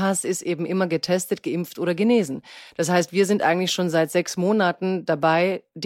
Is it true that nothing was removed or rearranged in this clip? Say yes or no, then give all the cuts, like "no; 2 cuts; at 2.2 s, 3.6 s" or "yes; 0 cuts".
yes; 0 cuts